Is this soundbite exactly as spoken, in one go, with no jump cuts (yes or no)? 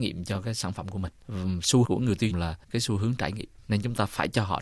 no